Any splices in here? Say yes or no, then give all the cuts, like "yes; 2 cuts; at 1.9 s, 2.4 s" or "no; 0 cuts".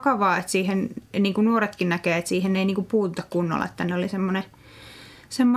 no; 0 cuts